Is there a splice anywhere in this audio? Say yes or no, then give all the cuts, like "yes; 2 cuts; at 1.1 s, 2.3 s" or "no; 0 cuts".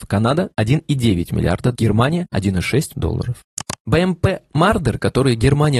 yes; 2 cuts; at 1.7 s, 2.9 s